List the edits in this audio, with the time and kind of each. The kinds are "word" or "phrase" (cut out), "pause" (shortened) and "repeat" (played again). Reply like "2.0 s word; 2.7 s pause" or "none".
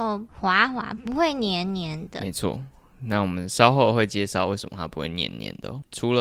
none